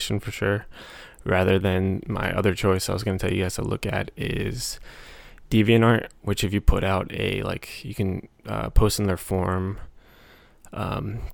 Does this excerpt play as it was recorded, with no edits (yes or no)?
yes